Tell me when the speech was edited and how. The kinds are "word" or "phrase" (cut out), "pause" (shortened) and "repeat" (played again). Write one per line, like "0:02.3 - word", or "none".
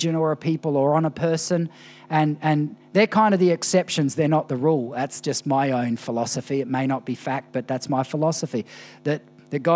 none